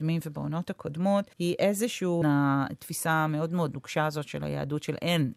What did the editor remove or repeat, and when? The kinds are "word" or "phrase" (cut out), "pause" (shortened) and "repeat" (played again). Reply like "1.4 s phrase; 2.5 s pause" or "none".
1.3 s pause; 2.2 s phrase